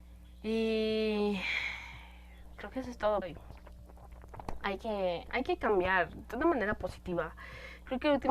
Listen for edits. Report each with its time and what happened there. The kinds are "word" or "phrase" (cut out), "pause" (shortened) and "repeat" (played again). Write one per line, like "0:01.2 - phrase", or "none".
0:02.6 - word
0:03.2 - phrase